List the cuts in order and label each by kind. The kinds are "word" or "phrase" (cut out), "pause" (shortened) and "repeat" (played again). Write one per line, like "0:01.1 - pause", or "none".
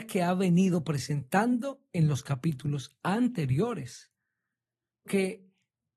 0:05.1 - word